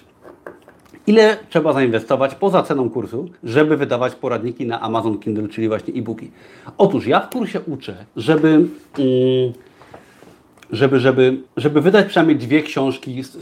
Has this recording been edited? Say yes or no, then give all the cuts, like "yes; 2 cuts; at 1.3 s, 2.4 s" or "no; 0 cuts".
yes; 3 cuts; at 3.4 s, 8.1 s, 11.5 s